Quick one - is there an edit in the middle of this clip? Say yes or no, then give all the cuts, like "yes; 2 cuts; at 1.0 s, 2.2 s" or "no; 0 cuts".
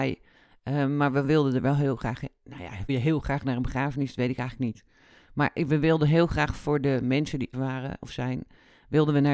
yes; 2 cuts; at 2.9 s, 7.5 s